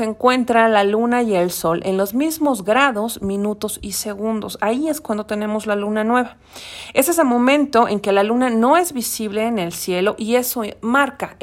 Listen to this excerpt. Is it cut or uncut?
uncut